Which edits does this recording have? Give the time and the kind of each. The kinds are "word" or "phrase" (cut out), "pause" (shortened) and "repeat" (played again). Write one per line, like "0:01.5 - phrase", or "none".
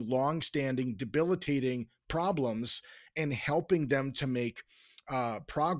none